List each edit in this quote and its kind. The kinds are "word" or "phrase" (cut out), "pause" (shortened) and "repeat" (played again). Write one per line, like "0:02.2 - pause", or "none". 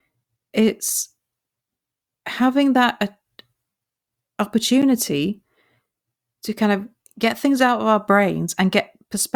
none